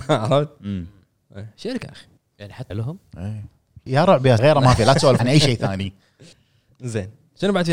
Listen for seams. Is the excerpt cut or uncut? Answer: cut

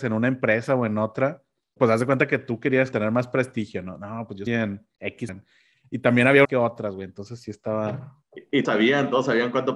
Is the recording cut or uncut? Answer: cut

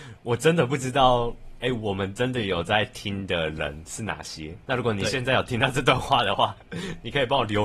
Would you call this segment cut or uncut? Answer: cut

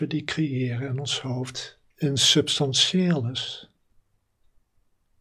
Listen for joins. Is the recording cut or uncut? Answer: cut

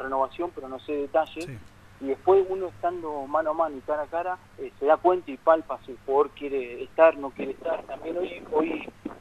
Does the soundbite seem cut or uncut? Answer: cut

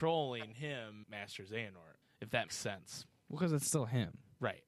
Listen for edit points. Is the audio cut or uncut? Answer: cut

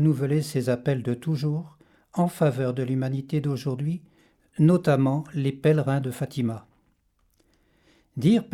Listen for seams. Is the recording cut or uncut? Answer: uncut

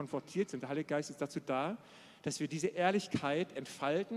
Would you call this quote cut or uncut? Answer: uncut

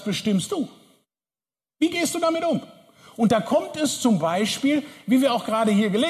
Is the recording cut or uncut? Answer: uncut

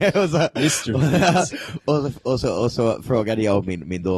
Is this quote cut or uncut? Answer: uncut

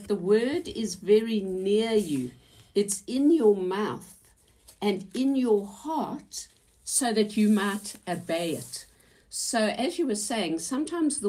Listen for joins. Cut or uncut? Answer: uncut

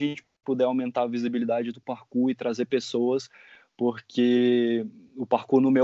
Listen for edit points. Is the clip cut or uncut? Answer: uncut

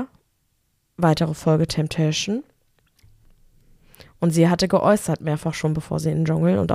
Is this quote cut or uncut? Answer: uncut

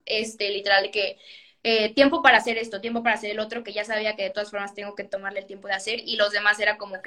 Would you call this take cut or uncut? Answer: uncut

